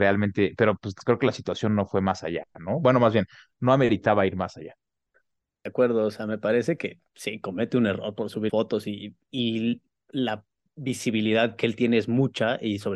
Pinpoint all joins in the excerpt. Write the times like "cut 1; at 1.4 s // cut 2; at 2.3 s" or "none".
cut 1; at 5.7 s // cut 2; at 8.5 s // cut 3; at 9.3 s